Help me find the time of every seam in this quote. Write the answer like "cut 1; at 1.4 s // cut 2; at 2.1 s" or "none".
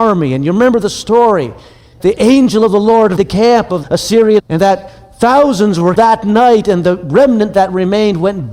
cut 1; at 2.0 s // cut 2; at 3.2 s // cut 3; at 3.8 s // cut 4; at 4.4 s // cut 5; at 6.0 s